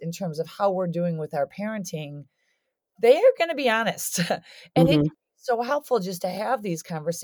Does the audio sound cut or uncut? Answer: uncut